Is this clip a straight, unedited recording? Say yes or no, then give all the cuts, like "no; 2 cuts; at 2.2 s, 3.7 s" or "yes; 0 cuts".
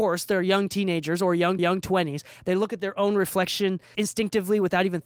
no; 2 cuts; at 1.6 s, 3.9 s